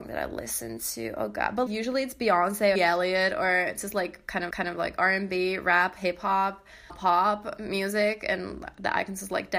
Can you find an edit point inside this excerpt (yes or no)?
yes